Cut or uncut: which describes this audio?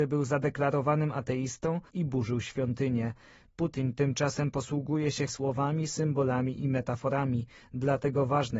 cut